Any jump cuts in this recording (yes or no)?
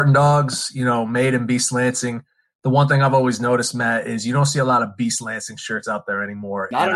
no